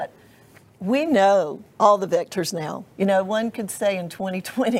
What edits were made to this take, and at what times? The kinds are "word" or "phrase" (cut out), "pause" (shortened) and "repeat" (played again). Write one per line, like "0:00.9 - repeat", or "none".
0:01.7 - pause
0:02.9 - pause